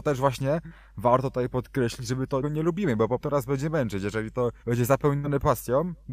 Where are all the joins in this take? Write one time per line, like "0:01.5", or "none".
0:02.4
0:03.2
0:04.6